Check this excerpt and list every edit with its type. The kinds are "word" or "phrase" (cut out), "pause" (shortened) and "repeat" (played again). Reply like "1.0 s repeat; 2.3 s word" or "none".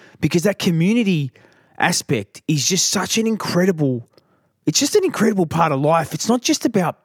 none

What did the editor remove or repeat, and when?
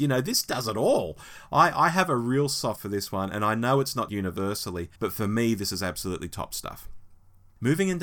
2.8 s word; 4.1 s word; 5.0 s pause

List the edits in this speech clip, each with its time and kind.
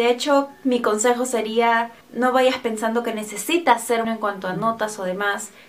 2.0 s pause; 4.0 s word

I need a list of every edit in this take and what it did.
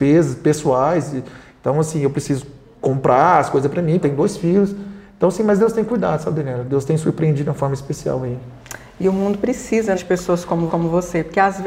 4.0 s phrase; 7.4 s phrase; 10.0 s word; 10.7 s repeat

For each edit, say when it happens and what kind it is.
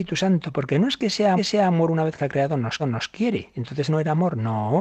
1.4 s repeat; 2.2 s word; 2.8 s repeat; 3.9 s word

